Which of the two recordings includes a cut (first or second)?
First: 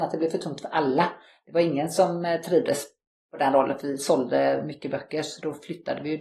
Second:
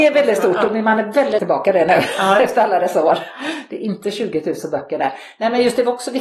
second